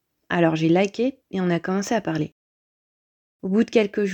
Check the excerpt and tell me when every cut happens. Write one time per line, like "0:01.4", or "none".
0:01.2